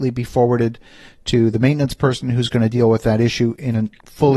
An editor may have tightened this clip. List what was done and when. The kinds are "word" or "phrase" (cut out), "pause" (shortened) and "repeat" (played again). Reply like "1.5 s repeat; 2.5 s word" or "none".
none